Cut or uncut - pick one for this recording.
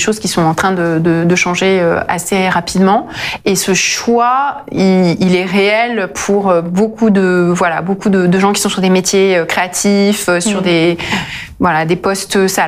uncut